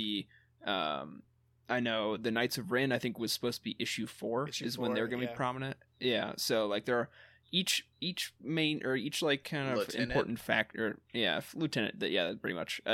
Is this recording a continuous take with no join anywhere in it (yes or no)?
no